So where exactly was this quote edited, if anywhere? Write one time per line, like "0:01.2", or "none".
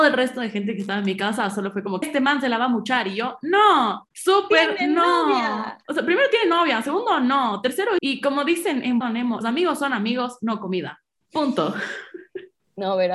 0:02.0
0:08.0
0:09.0
0:09.4

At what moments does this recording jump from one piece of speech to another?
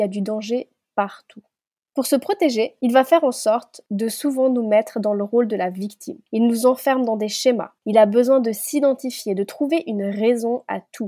0:06.3
0:07.8

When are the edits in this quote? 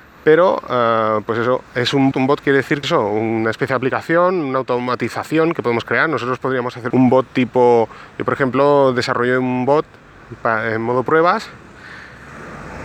0:02.1
0:02.8
0:06.9

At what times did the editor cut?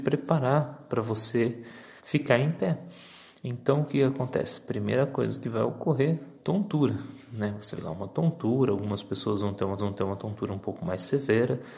0:02.0
0:07.8
0:09.8

